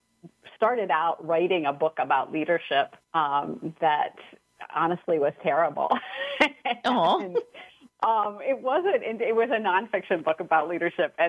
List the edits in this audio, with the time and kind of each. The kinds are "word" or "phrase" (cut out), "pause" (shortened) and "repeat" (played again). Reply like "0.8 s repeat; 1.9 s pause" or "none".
3.0 s pause